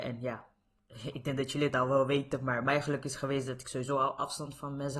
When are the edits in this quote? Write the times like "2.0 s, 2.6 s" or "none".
none